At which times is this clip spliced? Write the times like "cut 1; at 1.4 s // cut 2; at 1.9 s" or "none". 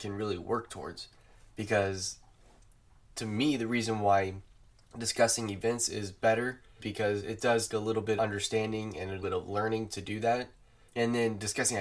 cut 1; at 6.8 s // cut 2; at 7.7 s // cut 3; at 8.2 s // cut 4; at 9.2 s // cut 5; at 10.9 s